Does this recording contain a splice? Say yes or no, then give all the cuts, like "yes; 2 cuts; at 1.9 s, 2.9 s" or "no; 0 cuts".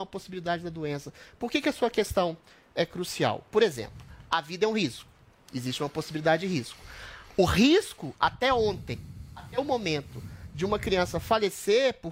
no; 0 cuts